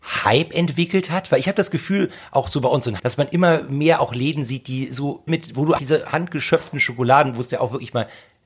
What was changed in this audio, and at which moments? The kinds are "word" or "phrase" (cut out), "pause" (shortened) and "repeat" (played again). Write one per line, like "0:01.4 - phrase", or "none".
0:03.0 - word
0:05.3 - word
0:05.8 - word